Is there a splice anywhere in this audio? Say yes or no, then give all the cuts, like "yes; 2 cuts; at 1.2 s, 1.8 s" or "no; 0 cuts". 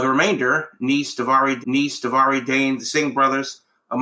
yes; 1 cut; at 1.6 s